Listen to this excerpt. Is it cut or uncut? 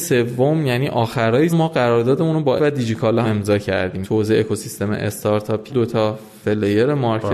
cut